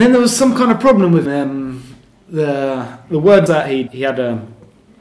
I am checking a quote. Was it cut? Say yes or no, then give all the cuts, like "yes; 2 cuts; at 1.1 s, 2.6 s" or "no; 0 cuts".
yes; 3 cuts; at 1.2 s, 3.5 s, 3.9 s